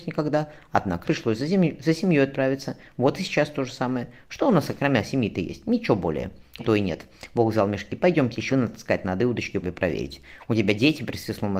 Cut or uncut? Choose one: cut